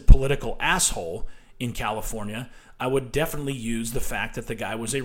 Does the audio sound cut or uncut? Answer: uncut